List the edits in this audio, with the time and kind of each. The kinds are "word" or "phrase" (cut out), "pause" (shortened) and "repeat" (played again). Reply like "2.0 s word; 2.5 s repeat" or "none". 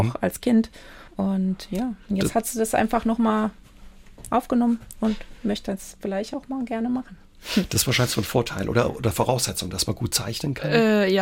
1.1 s pause